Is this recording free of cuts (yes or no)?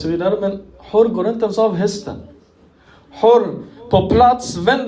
yes